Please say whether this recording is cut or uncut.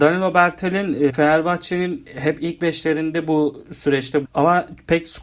cut